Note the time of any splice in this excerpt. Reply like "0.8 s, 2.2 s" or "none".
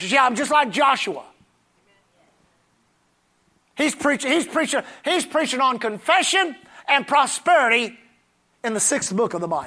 none